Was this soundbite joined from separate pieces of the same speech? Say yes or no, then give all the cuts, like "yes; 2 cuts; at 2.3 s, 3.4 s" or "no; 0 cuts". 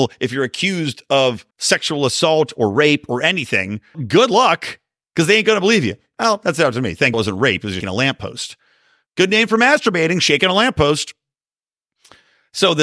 yes; 4 cuts; at 1.5 s, 3.9 s, 7.1 s, 7.8 s